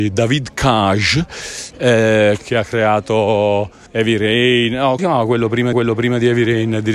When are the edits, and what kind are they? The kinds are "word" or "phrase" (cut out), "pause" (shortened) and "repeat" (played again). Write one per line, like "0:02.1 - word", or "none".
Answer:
0:02.4 - word
0:03.9 - pause
0:05.0 - word
0:05.7 - repeat